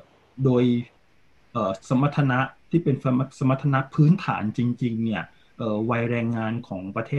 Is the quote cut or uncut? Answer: uncut